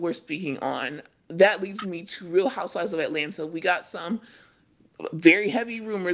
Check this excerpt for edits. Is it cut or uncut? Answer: uncut